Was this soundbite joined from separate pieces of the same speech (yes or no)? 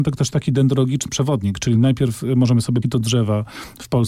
yes